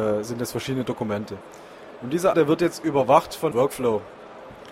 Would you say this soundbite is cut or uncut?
cut